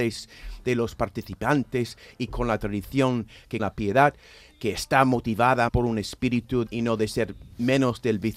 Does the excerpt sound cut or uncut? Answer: cut